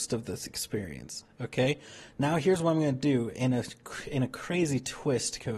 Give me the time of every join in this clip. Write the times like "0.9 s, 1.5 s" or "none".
none